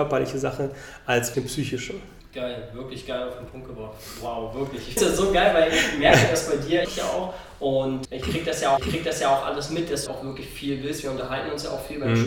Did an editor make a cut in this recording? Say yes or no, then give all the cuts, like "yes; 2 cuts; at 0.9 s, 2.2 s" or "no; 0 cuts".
yes; 7 cuts; at 1.3 s, 2.2 s, 5.0 s, 6.8 s, 8.0 s, 8.8 s, 10.1 s